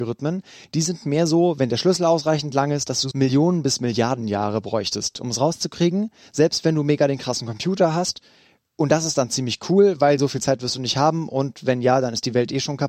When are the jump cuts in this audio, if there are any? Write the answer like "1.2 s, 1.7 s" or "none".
3.1 s